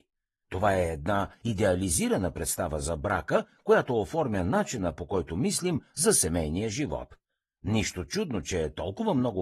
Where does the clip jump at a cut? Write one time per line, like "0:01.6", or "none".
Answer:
none